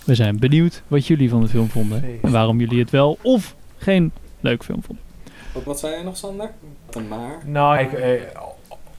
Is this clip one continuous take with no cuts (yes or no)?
no